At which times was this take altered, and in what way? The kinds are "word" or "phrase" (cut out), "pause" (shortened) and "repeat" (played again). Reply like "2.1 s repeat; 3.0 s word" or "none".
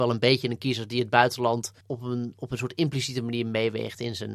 1.8 s pause